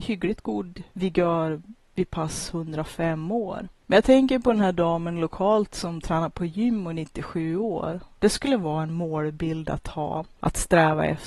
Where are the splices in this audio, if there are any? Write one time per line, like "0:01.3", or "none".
none